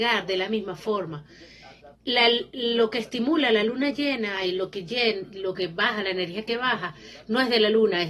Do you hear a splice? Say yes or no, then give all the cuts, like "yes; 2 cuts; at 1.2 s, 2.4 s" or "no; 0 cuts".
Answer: yes; 1 cut; at 2.0 s